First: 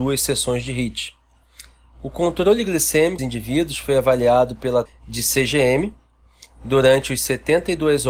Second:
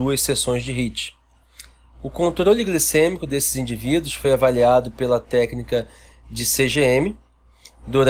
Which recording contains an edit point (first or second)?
first